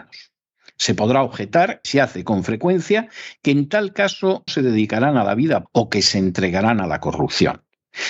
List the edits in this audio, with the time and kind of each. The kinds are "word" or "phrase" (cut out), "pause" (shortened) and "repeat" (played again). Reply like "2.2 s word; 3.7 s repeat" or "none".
1.8 s word; 4.5 s word; 5.7 s word